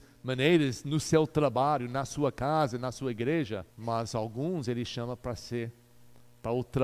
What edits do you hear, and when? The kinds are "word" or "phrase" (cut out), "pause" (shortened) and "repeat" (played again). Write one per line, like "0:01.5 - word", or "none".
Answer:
0:03.7 - pause